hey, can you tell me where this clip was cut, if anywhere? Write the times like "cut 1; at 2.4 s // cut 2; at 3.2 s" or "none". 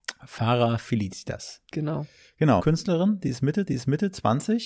cut 1; at 1.7 s // cut 2; at 2.6 s // cut 3; at 3.7 s